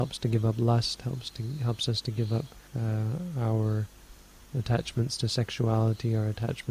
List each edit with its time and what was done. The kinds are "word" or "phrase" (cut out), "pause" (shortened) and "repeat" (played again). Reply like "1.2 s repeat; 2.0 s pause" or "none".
2.7 s pause